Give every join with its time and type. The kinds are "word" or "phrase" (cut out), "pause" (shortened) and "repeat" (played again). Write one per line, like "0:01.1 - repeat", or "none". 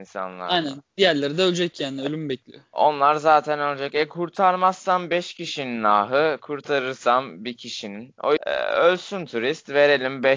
0:08.4 - word